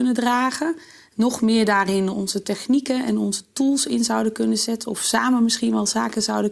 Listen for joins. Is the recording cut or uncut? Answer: cut